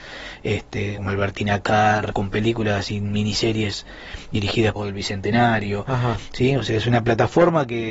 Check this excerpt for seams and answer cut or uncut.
cut